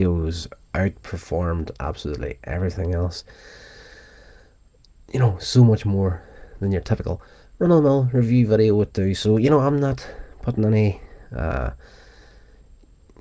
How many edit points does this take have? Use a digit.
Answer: 0